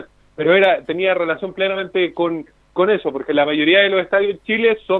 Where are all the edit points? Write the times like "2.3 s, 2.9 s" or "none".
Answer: none

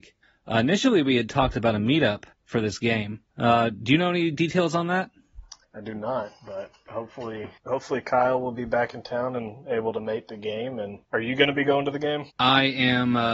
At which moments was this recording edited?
2.3 s, 3.3 s, 5.6 s, 7.6 s, 11.0 s, 12.3 s

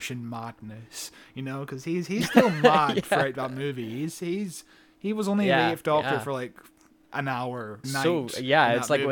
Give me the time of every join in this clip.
7.8 s

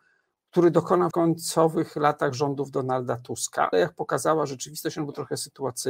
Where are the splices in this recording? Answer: 1.1 s, 3.7 s

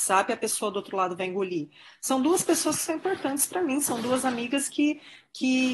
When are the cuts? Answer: none

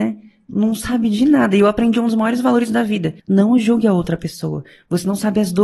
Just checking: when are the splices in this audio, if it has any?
3.2 s

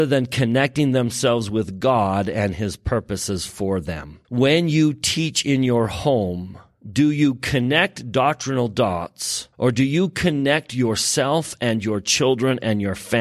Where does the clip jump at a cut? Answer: 4.2 s, 9.5 s

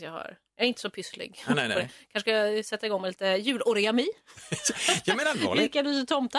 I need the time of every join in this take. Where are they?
none

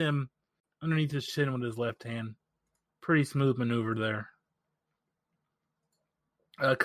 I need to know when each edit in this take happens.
none

